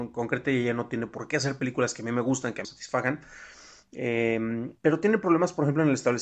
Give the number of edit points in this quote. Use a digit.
2